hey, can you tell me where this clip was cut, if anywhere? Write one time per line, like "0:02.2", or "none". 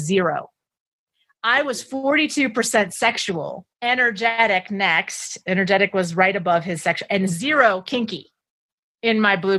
0:03.7